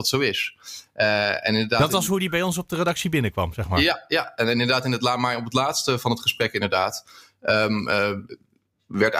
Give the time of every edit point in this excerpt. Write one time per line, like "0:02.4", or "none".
none

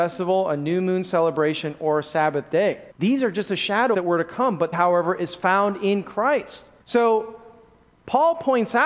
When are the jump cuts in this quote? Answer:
0:02.9
0:03.9
0:04.7
0:06.8

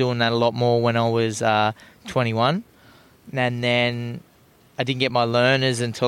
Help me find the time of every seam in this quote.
none

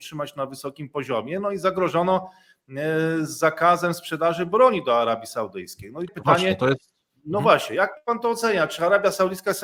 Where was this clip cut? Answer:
0:06.1

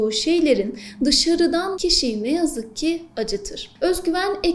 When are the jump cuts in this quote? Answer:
0:01.7

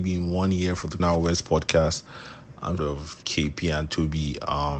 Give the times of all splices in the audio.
0:01.0
0:02.8

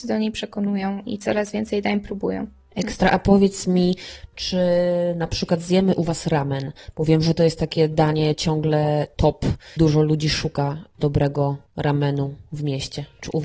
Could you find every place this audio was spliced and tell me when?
0:01.1
0:09.8
0:11.7

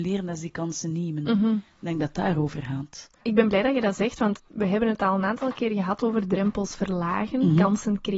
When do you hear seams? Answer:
none

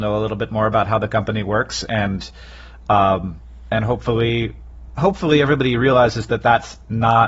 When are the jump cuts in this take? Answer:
none

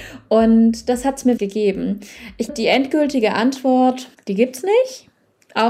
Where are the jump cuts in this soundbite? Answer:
0:01.4
0:02.5
0:04.1

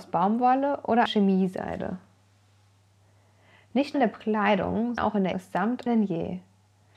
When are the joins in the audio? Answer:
0:01.1
0:03.9
0:05.0
0:05.3
0:05.9

